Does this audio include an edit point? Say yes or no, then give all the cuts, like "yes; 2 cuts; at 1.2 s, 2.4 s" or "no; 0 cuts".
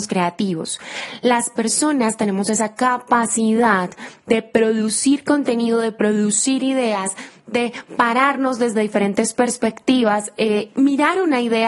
no; 0 cuts